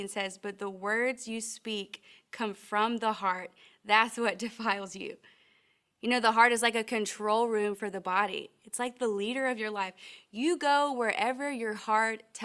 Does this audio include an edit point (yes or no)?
no